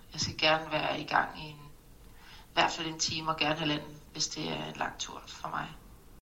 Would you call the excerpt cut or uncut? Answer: uncut